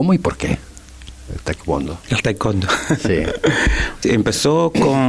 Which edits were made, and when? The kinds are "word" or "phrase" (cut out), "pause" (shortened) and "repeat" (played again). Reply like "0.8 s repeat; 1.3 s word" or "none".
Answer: 4.0 s word